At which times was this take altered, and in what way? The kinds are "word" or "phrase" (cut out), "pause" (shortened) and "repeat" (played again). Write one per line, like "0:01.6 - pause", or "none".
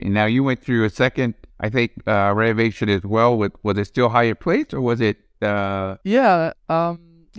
0:01.5 - pause
0:06.0 - pause

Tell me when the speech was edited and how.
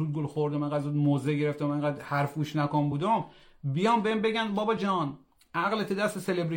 none

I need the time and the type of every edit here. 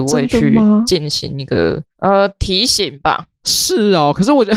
0:03.3 - pause

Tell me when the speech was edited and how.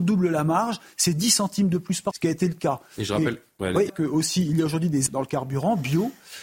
0:02.1 - word
0:03.9 - phrase
0:05.1 - word

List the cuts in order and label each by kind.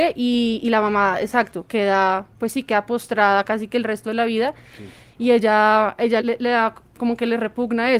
0:02.3 - pause
0:06.2 - word

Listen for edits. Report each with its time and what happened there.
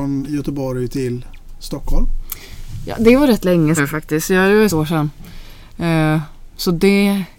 0:03.8 - word
0:04.7 - word

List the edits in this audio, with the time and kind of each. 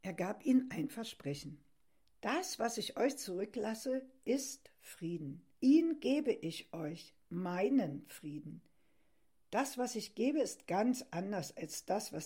0:05.6 - pause

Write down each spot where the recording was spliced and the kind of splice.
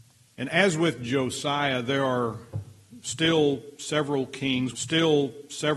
0:04.7 - repeat

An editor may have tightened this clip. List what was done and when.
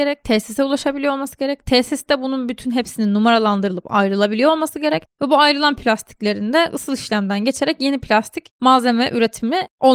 none

